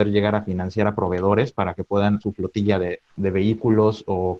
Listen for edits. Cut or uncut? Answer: cut